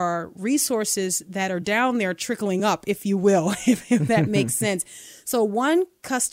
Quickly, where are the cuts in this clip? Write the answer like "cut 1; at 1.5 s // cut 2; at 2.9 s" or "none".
none